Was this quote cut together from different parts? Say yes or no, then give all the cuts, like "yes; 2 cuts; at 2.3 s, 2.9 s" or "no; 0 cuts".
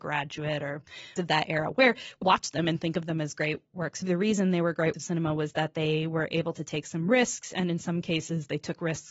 yes; 4 cuts; at 1.2 s, 2.2 s, 4.0 s, 4.9 s